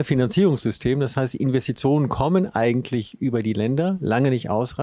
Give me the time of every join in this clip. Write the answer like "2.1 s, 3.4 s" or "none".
none